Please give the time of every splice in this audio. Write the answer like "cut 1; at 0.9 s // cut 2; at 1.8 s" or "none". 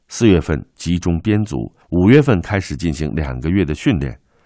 cut 1; at 1.8 s